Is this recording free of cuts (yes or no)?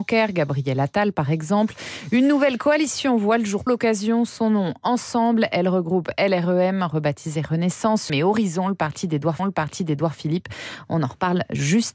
no